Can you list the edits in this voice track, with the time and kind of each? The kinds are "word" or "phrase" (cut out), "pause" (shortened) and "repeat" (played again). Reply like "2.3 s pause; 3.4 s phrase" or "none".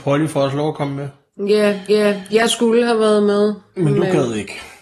1.9 s repeat